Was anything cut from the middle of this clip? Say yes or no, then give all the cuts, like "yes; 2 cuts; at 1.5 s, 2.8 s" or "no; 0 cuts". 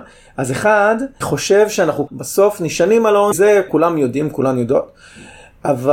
yes; 4 cuts; at 1.2 s, 2.1 s, 3.3 s, 3.7 s